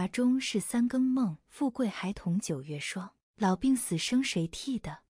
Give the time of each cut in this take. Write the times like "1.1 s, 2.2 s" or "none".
1.4 s, 3.2 s